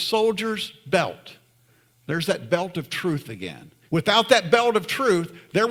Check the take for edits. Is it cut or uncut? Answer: cut